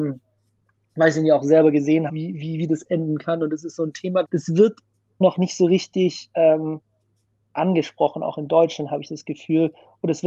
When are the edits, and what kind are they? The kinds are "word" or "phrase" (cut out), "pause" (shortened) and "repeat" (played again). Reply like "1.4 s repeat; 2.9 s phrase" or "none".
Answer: 2.1 s word; 4.2 s word; 5.2 s word